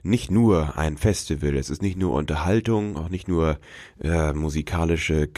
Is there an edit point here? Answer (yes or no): no